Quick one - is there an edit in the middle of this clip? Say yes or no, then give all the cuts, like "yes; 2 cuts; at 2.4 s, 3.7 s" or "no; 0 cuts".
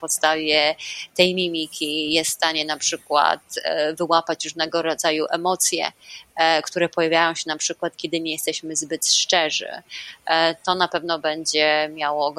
no; 0 cuts